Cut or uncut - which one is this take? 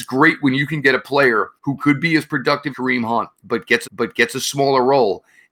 cut